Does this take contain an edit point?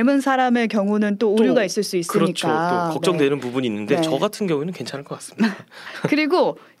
no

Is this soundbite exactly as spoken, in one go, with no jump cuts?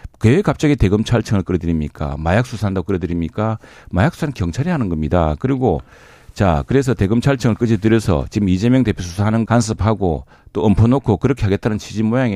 no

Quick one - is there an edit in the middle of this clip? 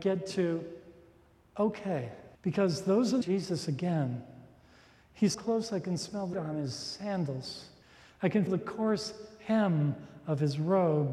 yes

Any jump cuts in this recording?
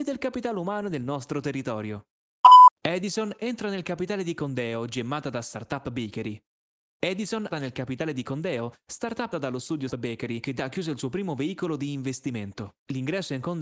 yes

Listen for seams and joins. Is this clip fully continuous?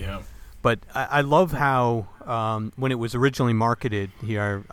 yes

